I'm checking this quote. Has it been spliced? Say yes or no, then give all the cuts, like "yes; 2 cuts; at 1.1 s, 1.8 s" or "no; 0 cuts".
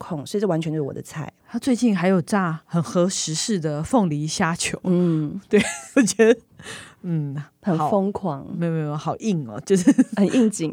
yes; 1 cut; at 5.9 s